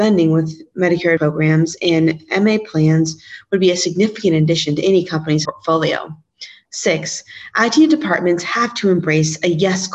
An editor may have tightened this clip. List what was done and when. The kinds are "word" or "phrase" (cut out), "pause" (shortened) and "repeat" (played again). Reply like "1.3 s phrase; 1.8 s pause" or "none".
1.2 s word; 5.4 s word